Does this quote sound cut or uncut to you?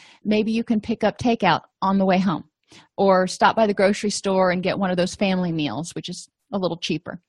uncut